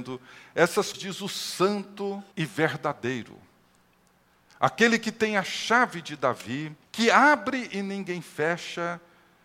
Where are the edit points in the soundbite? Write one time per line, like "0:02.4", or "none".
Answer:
0:00.9
0:02.3
0:06.8

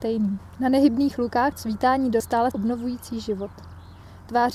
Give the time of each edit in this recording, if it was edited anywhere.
0:01.5
0:02.2
0:02.5

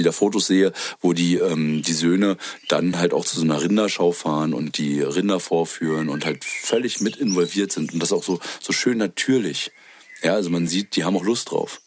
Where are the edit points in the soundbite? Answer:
none

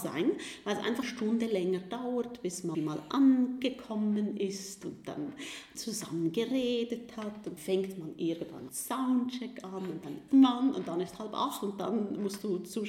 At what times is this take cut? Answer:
0:01.0
0:02.7
0:05.7
0:07.6
0:08.7
0:10.3

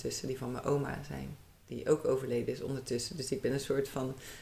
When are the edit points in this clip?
none

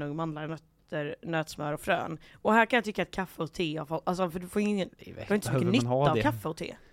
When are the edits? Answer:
none

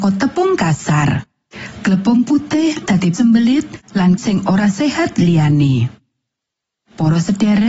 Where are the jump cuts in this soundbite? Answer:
0:02.8
0:03.1
0:04.2

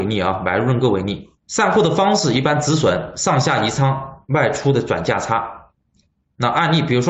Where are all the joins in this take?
0:01.4

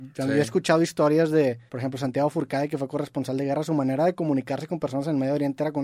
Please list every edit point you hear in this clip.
0:01.7

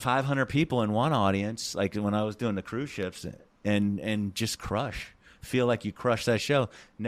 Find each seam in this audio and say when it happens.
none

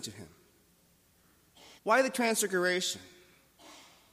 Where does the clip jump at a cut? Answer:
0:01.8

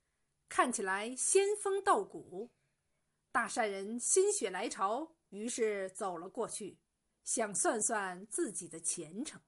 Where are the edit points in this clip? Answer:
0:05.2

